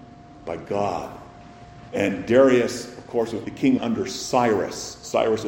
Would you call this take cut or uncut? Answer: cut